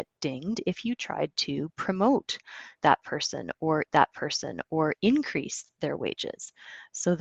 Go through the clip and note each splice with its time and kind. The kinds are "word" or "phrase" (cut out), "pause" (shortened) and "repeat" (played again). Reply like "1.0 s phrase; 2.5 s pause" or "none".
3.9 s repeat